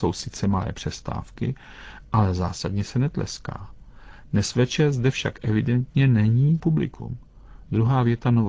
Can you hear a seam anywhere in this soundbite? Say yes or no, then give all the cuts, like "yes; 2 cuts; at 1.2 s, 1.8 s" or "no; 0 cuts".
yes; 1 cut; at 6.6 s